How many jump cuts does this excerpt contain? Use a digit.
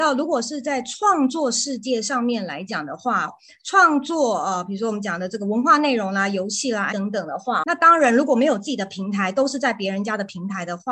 3